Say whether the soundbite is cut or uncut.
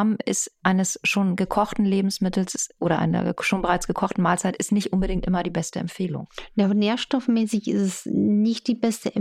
uncut